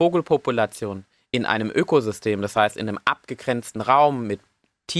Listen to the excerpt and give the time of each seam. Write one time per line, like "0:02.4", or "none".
none